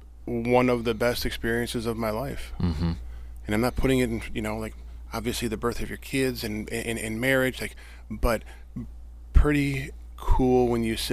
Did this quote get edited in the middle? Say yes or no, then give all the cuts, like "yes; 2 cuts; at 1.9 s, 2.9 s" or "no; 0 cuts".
no; 0 cuts